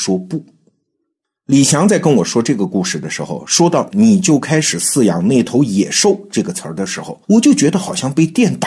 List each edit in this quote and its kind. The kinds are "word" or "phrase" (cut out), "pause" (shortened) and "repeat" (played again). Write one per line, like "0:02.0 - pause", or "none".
0:07.2 - pause